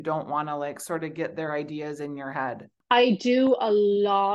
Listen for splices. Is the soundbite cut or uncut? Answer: uncut